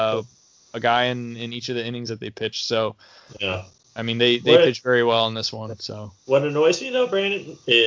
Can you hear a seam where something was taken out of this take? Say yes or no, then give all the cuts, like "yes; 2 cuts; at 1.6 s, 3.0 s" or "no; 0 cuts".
no; 0 cuts